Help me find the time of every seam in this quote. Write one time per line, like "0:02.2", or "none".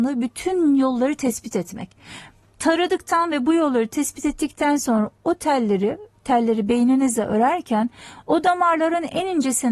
none